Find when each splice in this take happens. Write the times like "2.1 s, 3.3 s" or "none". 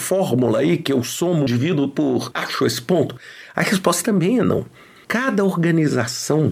1.5 s, 2.4 s